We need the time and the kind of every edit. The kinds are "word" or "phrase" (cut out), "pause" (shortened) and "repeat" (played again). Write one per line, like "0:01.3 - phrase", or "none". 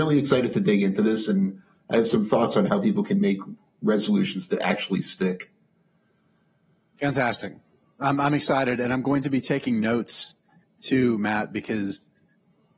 none